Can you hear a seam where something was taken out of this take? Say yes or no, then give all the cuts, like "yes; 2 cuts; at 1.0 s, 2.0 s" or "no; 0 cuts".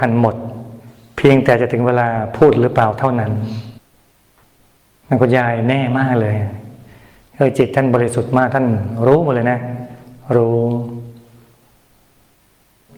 no; 0 cuts